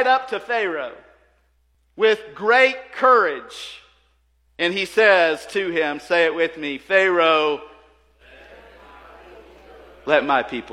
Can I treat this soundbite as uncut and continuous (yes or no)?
yes